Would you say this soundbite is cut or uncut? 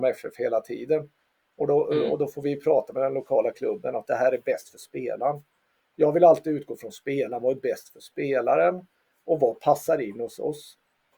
uncut